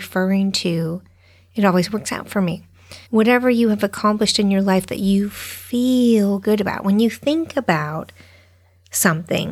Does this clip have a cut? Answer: yes; 1 cut; at 3.1 s

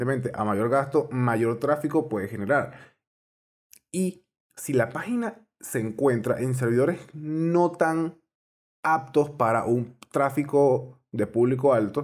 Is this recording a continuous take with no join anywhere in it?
yes; 0 cuts

